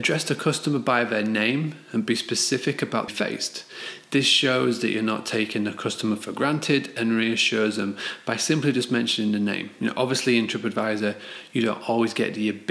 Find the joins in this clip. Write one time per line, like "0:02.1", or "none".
0:03.1